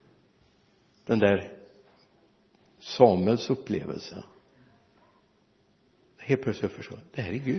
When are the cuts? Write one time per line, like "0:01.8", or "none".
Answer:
none